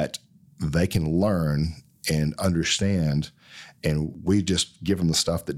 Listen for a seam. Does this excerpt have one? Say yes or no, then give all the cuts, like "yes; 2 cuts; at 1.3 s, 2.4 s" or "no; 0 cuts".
no; 0 cuts